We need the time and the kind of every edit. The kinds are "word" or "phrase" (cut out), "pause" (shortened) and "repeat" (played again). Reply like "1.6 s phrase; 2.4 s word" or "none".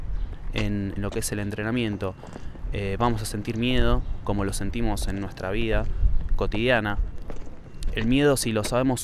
1.0 s word; 6.3 s word